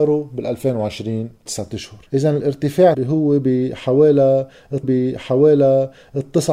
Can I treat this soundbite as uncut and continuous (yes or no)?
no